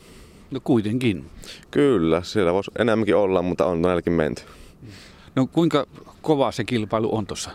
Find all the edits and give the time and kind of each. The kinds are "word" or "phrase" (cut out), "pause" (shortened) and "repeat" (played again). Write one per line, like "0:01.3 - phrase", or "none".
none

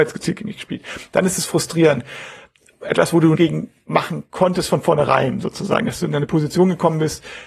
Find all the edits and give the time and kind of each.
0:03.3 - phrase

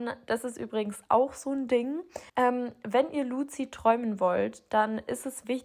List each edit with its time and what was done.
0:02.3 - pause

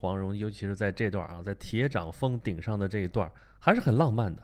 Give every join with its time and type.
0:03.4 - pause

